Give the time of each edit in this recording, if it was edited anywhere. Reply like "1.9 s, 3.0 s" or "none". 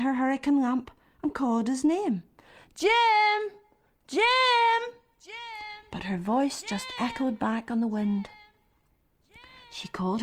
none